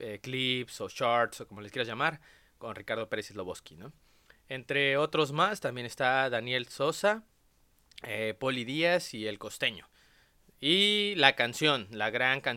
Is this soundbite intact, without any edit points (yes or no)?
yes